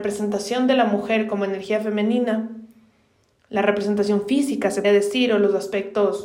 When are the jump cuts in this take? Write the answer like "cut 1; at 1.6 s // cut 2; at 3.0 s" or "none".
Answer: cut 1; at 4.8 s

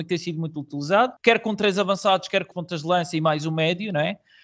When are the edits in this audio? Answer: cut 1; at 1.2 s // cut 2; at 2.5 s

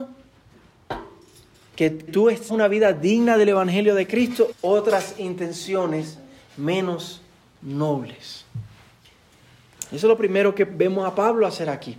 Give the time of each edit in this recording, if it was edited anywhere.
cut 1; at 2.1 s // cut 2; at 2.5 s // cut 3; at 4.5 s

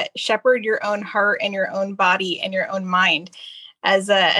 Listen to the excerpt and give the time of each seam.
none

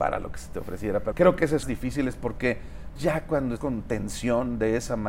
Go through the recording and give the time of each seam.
cut 1; at 1.1 s // cut 2; at 1.6 s // cut 3; at 3.0 s // cut 4; at 3.6 s

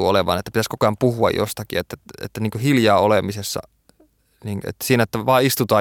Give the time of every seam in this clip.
none

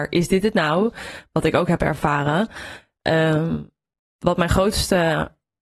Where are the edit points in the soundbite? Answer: none

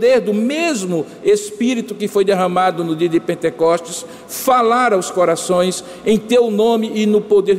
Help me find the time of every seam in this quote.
none

